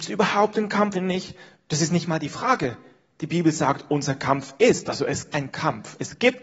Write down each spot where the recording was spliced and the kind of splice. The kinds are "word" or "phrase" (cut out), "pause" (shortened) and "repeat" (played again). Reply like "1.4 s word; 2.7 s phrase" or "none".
0.9 s word; 5.3 s word